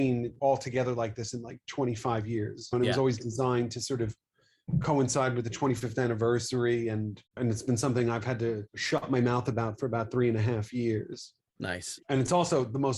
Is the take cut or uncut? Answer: cut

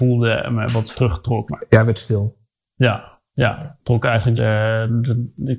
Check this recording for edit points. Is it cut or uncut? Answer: cut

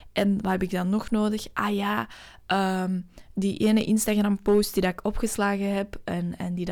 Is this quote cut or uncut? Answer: uncut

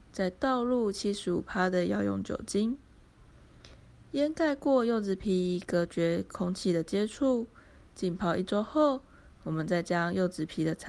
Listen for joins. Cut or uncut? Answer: uncut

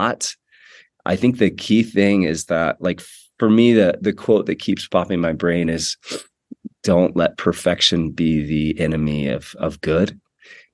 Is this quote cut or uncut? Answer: uncut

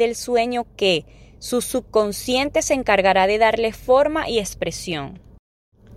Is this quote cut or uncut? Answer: uncut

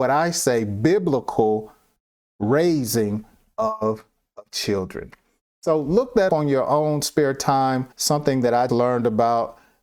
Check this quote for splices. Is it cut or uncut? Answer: cut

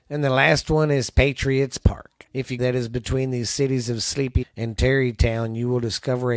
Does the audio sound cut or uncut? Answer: cut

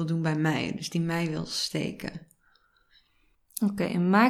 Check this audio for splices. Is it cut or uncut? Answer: uncut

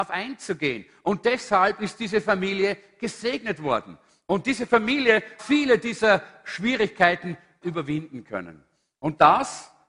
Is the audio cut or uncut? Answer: cut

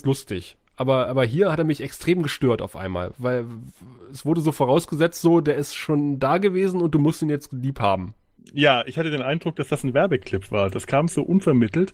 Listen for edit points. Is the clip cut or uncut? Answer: uncut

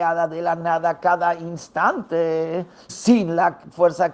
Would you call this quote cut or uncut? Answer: cut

